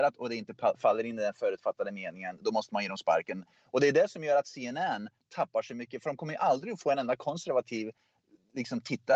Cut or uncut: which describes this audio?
uncut